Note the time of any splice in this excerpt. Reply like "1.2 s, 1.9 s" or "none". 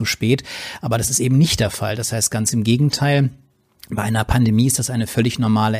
none